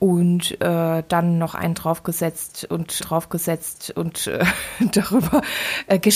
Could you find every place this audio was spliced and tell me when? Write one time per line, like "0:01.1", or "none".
0:03.0